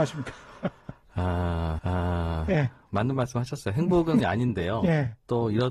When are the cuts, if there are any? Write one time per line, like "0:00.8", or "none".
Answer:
0:01.8
0:04.2

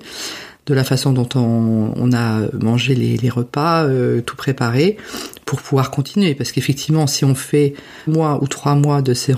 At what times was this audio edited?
0:08.1

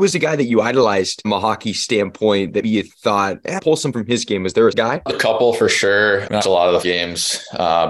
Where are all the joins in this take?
0:01.2
0:02.6
0:03.6
0:03.9
0:04.7
0:05.1
0:06.4
0:06.8

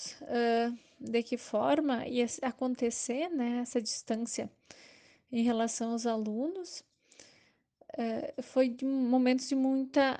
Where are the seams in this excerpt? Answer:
none

